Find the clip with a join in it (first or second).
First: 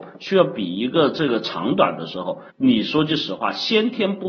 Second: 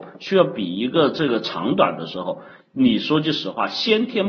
first